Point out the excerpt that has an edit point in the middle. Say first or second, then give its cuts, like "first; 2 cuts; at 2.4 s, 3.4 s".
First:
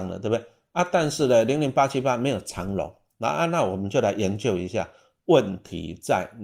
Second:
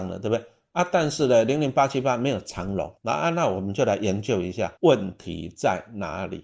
second; 2 cuts; at 3.0 s, 4.8 s